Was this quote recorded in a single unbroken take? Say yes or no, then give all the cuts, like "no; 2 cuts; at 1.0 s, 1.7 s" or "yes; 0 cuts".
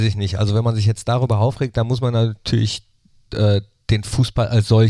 yes; 0 cuts